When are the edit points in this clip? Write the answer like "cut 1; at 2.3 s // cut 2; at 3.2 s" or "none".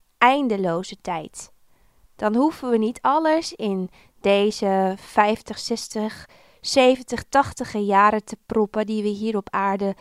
none